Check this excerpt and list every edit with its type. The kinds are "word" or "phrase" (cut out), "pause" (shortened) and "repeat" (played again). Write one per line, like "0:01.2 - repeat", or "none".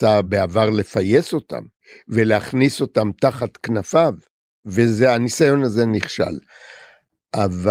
none